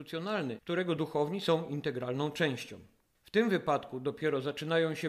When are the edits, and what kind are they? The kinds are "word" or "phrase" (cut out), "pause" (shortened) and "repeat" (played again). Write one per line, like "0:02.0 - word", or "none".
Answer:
none